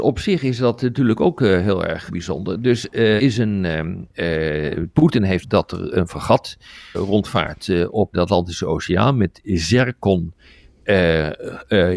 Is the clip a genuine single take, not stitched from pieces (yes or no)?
no